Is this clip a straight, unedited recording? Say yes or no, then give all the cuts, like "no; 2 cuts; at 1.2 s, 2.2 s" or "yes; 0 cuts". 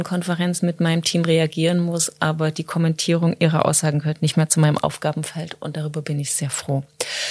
yes; 0 cuts